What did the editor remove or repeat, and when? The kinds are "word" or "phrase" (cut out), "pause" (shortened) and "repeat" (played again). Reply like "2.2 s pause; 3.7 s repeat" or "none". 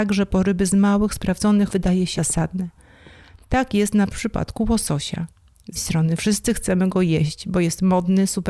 1.7 s word; 2.2 s word; 4.1 s phrase; 5.8 s word

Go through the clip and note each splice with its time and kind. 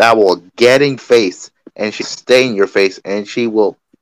1.0 s word; 2.0 s word

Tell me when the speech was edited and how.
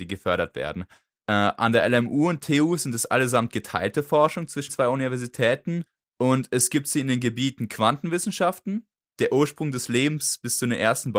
4.7 s word

